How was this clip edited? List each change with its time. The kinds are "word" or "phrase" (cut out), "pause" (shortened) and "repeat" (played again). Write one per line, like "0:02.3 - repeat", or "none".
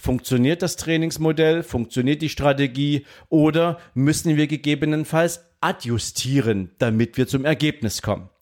none